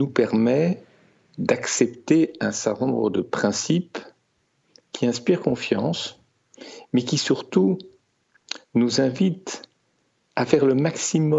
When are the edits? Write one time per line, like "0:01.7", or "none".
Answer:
none